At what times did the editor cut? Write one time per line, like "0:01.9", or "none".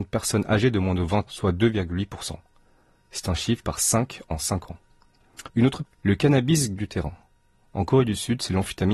0:01.3
0:03.6
0:05.5
0:05.8
0:06.8